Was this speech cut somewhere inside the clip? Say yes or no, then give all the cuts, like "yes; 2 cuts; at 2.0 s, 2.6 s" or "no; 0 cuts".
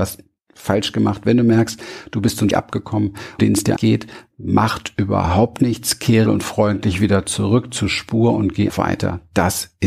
yes; 5 cuts; at 2.5 s, 3.4 s, 3.8 s, 6.3 s, 8.7 s